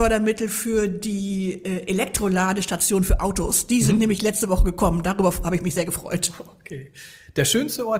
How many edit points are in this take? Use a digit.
0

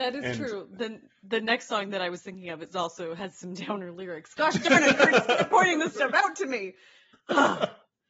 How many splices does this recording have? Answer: 0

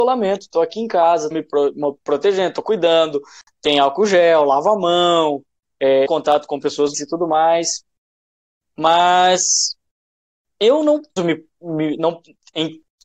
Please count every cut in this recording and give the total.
4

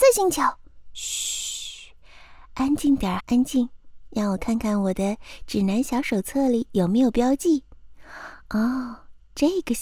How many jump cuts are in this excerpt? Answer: 1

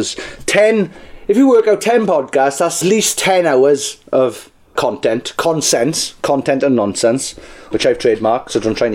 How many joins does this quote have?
1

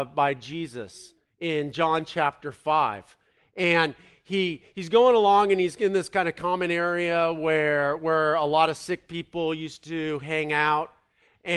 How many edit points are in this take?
0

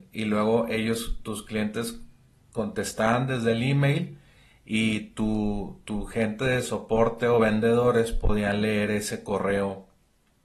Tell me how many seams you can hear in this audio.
0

